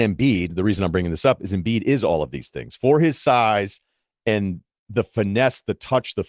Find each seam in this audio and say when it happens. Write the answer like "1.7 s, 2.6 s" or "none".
none

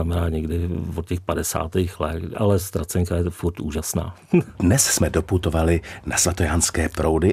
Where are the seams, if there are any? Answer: 4.5 s

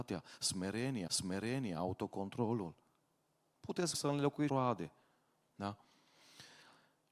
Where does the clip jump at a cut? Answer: 1.1 s, 3.9 s, 4.5 s

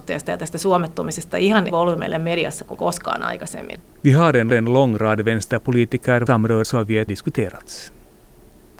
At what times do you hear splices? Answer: 1.7 s, 2.8 s, 3.9 s, 4.5 s, 6.3 s, 6.6 s, 7.1 s

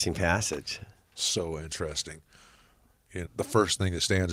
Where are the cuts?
3.2 s

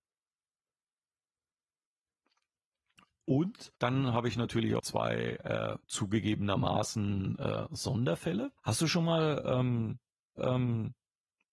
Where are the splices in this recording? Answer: 3.8 s, 4.8 s, 5.8 s, 8.6 s, 10.4 s

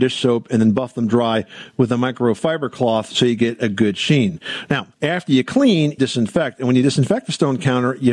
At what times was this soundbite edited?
4.9 s, 6.0 s

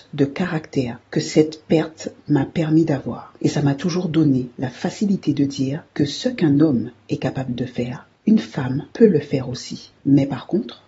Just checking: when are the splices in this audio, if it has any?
1.0 s, 3.4 s, 5.9 s, 8.2 s, 8.9 s, 10.0 s

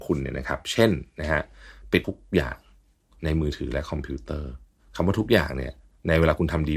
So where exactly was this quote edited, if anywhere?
2.0 s

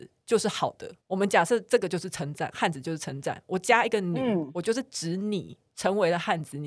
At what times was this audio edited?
1.0 s

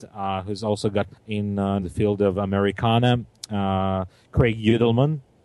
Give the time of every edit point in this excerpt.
1.1 s, 1.8 s

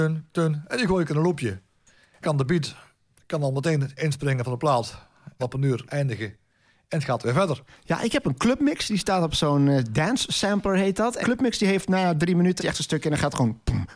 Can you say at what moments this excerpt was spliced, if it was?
2.2 s, 4.0 s, 5.4 s, 5.9 s, 11.2 s, 12.6 s

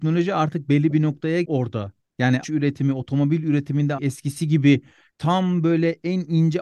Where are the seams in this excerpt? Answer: 1.4 s, 2.4 s, 4.0 s, 5.1 s

